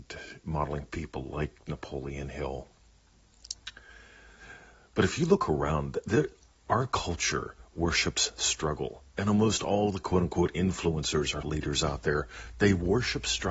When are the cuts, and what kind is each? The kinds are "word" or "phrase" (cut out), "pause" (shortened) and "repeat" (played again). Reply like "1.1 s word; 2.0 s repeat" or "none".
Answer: 11.4 s word